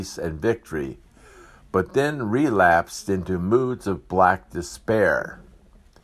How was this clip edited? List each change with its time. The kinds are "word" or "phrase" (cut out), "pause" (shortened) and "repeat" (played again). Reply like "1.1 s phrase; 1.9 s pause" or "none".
none